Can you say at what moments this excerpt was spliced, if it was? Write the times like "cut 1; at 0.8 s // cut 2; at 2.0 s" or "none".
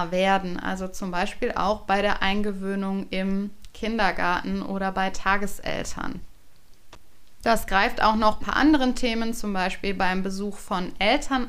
cut 1; at 8.4 s